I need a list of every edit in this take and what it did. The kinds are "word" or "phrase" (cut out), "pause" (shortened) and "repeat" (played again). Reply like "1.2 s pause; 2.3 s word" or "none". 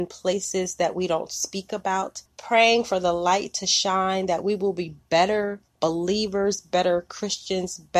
2.3 s pause; 5.7 s pause